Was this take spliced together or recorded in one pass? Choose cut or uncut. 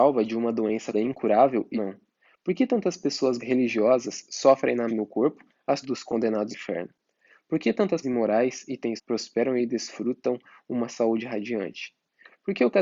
cut